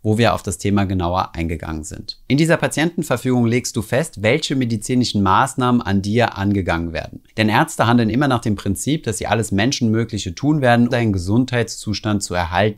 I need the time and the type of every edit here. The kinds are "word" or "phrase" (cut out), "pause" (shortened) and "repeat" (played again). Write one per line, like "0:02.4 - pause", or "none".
0:07.3 - pause
0:10.9 - word